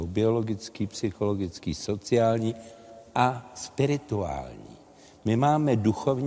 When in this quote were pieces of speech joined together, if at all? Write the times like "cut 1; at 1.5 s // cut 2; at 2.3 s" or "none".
none